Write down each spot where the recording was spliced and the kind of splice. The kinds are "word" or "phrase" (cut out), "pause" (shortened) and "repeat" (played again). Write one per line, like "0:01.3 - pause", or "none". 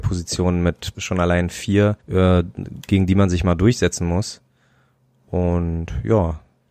0:00.9 - phrase
0:02.0 - pause